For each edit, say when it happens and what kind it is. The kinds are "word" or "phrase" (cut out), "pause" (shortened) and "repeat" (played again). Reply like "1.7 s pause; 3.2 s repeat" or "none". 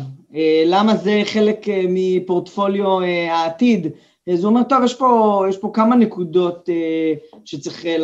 none